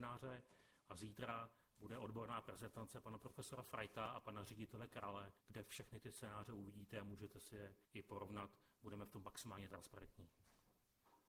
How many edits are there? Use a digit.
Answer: 2